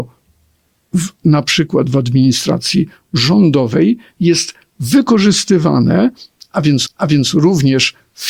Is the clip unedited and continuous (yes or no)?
no